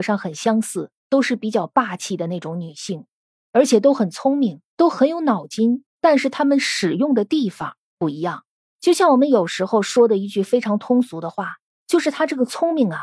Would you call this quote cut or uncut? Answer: cut